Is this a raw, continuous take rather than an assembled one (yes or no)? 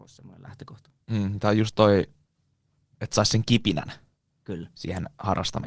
no